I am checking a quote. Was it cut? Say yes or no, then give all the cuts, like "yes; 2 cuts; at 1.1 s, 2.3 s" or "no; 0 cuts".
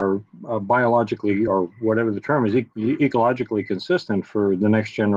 no; 0 cuts